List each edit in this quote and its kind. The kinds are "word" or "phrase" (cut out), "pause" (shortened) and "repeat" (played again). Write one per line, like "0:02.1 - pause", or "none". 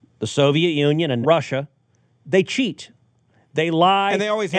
0:01.2 - word